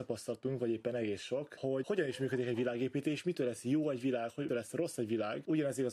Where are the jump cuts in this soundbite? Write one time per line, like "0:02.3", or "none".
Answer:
0:04.5